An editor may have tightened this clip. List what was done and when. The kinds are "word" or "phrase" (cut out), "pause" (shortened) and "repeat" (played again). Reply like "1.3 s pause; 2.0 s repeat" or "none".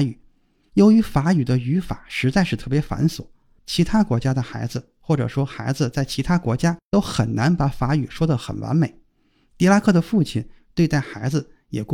none